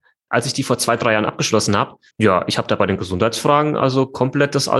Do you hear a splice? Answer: yes; 1 cut; at 2.1 s

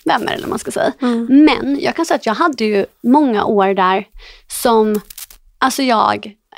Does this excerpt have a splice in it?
no; 0 cuts

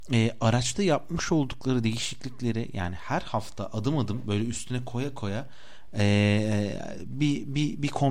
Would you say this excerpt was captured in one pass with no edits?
yes; 0 cuts

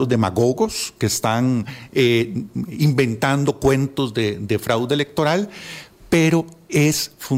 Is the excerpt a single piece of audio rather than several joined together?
yes; 0 cuts

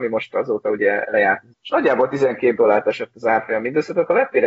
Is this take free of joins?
no; 1 cut; at 1.5 s

